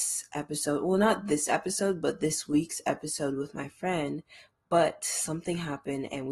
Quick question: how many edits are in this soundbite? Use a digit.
0